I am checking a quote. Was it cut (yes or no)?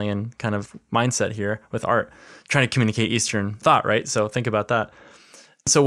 no